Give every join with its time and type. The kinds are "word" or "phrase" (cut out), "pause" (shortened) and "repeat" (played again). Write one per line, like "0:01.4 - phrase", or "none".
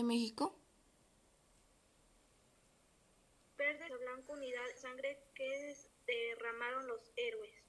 0:03.9 - word
0:04.8 - phrase
0:05.9 - pause